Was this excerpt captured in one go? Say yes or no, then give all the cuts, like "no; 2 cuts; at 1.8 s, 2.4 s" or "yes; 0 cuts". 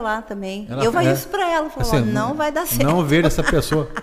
no; 1 cut; at 0.9 s